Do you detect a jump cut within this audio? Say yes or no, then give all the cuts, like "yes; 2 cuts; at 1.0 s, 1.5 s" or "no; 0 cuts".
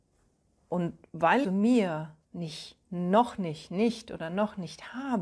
yes; 2 cuts; at 1.4 s, 2.2 s